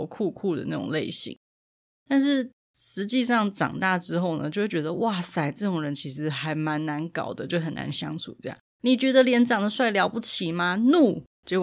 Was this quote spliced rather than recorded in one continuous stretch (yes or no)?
yes